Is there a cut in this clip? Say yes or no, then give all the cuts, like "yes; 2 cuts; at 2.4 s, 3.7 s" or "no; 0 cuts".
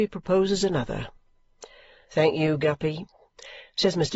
no; 0 cuts